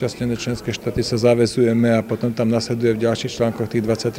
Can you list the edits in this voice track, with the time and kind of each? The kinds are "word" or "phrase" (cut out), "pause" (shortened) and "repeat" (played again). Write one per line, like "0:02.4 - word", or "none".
none